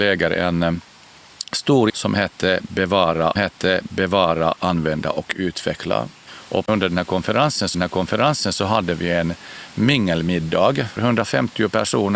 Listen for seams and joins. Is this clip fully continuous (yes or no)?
no